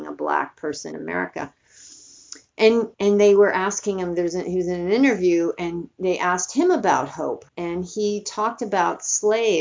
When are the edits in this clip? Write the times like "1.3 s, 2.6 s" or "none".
0.9 s, 2.9 s, 7.5 s